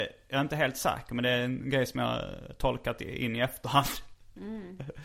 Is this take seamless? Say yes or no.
yes